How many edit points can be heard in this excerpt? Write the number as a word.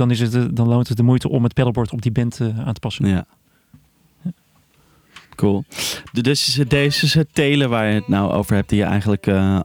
one